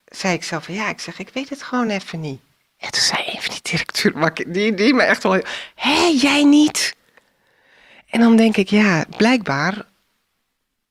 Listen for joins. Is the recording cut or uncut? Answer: uncut